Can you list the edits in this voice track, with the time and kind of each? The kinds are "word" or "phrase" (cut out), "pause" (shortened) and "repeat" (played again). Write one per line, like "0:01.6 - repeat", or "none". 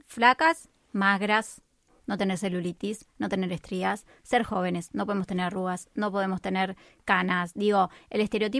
none